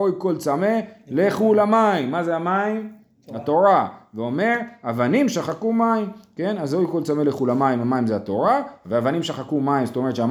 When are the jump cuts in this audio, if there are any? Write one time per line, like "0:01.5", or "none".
none